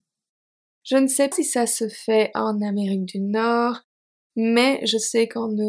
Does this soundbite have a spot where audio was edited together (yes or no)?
yes